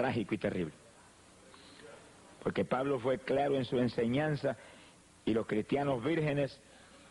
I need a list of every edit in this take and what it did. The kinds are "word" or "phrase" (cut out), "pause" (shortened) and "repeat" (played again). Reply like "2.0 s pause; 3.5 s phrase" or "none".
none